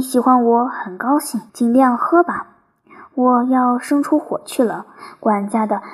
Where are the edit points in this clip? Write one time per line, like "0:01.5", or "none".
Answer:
0:01.5